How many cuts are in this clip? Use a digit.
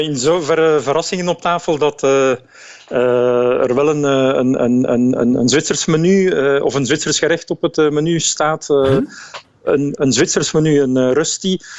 1